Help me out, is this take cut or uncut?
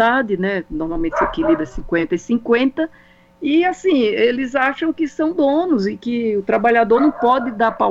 uncut